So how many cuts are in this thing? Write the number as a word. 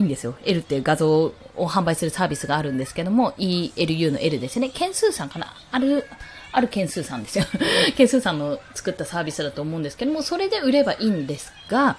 zero